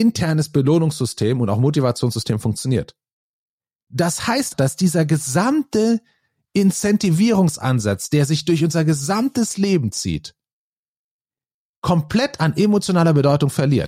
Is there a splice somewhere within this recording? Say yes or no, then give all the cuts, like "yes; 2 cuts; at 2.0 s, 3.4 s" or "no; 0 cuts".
yes; 1 cut; at 4.5 s